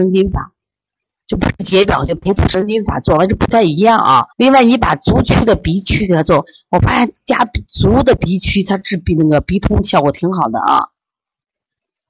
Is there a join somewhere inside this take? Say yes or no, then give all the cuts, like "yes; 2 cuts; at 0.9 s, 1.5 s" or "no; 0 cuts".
yes; 1 cut; at 4.3 s